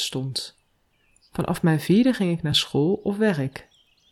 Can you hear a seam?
no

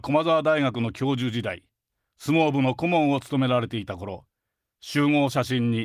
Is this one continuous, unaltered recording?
yes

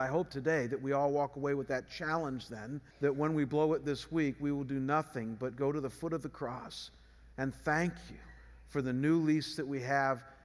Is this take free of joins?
no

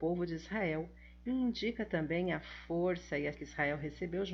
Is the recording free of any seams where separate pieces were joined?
no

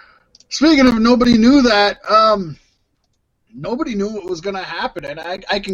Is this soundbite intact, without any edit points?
yes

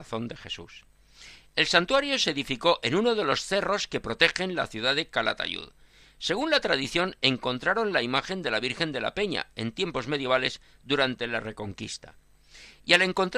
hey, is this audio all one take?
yes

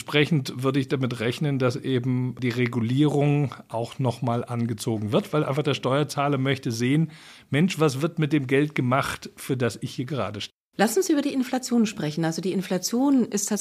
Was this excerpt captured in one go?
yes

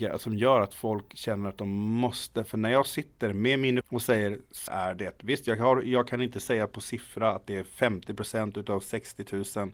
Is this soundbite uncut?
no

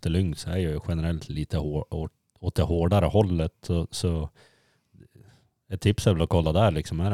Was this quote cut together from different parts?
no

